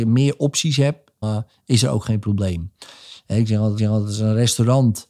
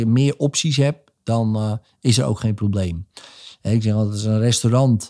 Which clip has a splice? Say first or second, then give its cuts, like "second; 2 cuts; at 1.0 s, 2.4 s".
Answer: first; 2 cuts; at 1.2 s, 3.8 s